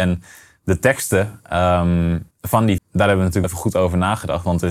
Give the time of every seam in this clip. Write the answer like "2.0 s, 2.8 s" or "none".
2.3 s, 2.8 s, 3.4 s